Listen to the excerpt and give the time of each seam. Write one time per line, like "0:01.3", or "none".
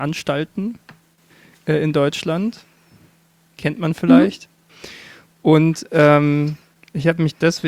none